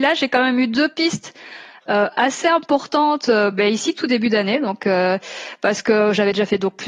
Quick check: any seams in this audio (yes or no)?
no